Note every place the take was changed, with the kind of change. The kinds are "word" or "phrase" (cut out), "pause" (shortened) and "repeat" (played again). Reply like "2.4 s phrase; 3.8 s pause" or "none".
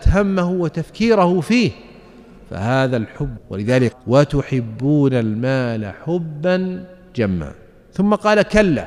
3.4 s word; 3.9 s word